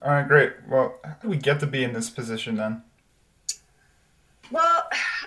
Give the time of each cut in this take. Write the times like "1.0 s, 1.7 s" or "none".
1.2 s

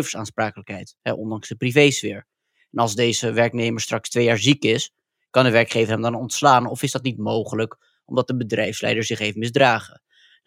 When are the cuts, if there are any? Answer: none

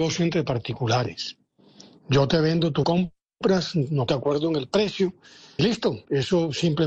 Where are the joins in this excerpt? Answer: 2.8 s, 4.1 s, 5.6 s

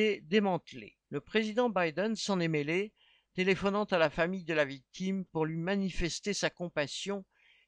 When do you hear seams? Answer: 1.0 s, 5.3 s

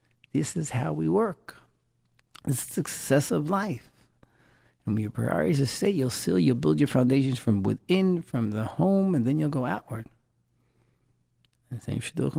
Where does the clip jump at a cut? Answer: none

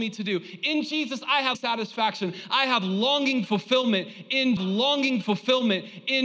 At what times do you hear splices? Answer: 1.5 s, 4.6 s

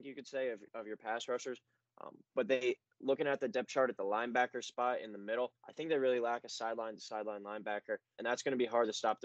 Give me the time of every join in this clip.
5.6 s, 8.2 s

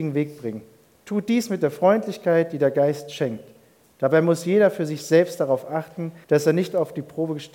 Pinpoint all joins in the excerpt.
6.2 s

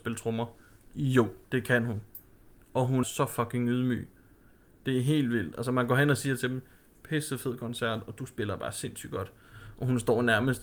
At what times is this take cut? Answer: 1.4 s, 3.0 s

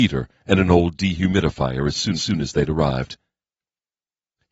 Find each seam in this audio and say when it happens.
2.1 s

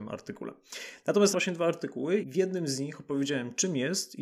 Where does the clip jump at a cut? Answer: 1.3 s, 2.2 s

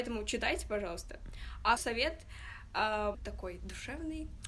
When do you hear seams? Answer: 1.8 s, 3.1 s

